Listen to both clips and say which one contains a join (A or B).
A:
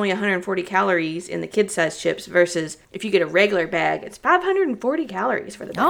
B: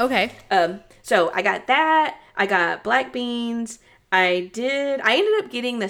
A